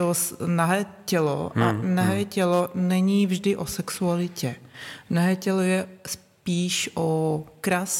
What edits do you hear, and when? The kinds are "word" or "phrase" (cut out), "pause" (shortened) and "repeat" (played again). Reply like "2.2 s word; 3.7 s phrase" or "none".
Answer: none